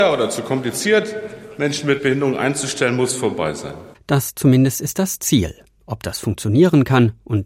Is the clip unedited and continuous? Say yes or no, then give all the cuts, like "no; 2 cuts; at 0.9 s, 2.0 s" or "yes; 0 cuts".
yes; 0 cuts